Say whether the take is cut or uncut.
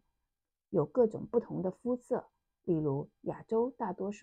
uncut